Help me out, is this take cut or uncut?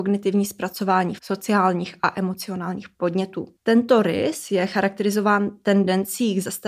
cut